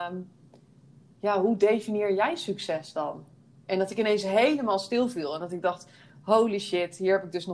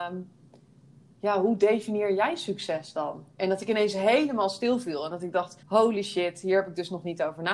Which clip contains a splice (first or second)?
second